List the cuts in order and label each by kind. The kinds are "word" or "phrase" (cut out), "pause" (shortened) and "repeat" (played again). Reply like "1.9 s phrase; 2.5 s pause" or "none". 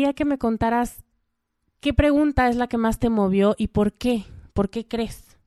none